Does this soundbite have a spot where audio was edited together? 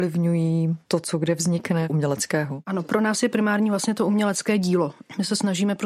no; 0 cuts

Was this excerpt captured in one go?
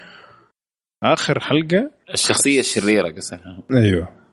no; 1 cut; at 2.0 s

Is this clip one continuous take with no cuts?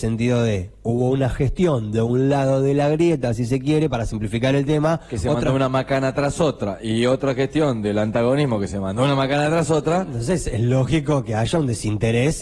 yes; 0 cuts

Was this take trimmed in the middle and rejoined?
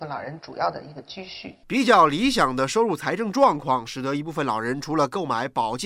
yes; 1 cut; at 1.6 s

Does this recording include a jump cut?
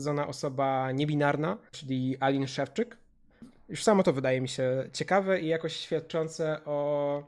no; 0 cuts

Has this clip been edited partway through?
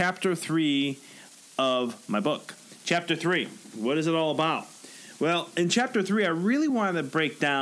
no; 0 cuts

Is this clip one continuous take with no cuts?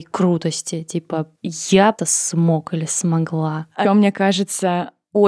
no; 3 cuts; at 1.4 s, 2.0 s, 3.8 s

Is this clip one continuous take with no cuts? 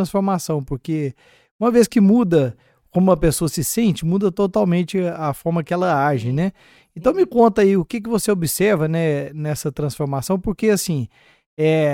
yes; 0 cuts

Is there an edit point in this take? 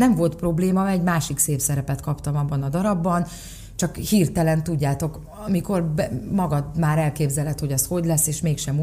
no; 0 cuts

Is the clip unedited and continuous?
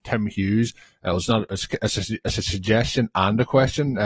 yes; 0 cuts

